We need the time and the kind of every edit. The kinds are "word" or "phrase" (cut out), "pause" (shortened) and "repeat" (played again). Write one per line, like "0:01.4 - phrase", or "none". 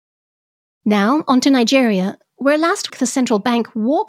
0:02.9 - word